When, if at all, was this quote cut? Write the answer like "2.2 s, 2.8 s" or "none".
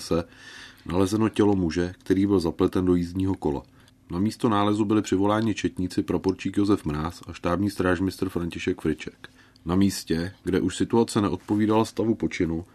3.8 s, 9.4 s